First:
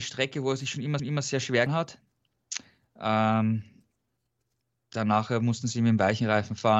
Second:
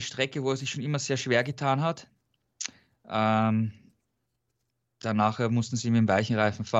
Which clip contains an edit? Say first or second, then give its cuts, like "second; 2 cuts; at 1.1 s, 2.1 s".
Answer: first; 2 cuts; at 1.0 s, 1.7 s